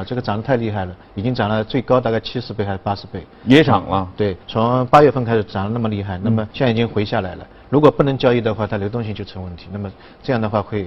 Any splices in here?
yes; 3 cuts; at 1.0 s, 4.4 s, 6.5 s

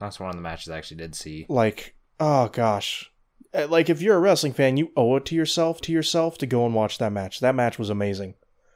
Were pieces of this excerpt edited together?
yes; 1 cut; at 5.8 s

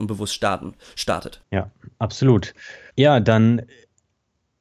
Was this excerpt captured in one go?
no; 1 cut; at 1.4 s

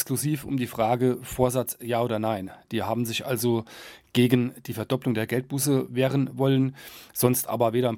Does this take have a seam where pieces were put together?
no; 0 cuts

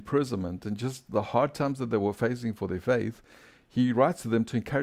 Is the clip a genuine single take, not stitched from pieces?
yes; 0 cuts

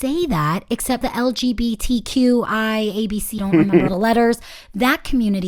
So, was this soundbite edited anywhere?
yes; 3 cuts; at 1.0 s, 3.4 s, 3.9 s

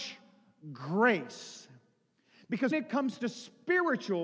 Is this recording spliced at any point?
yes; 1 cut; at 2.7 s

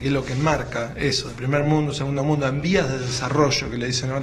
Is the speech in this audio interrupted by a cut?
no; 0 cuts

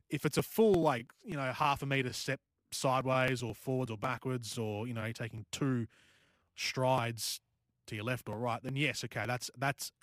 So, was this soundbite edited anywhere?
no; 0 cuts

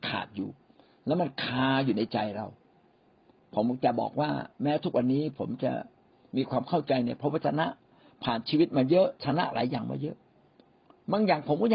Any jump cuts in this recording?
no; 0 cuts

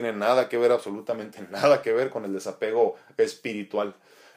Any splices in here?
no; 0 cuts

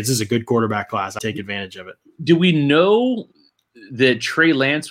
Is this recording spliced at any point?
yes; 1 cut; at 1.2 s

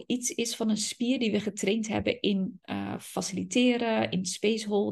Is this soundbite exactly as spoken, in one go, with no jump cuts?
yes; 0 cuts

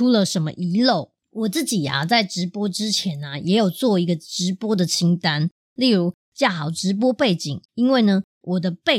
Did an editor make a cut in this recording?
yes; 2 cuts; at 1.2 s, 7.6 s

